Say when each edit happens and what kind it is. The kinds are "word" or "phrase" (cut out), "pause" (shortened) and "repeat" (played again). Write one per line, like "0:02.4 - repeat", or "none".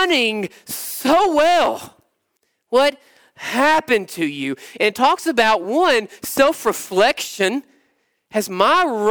none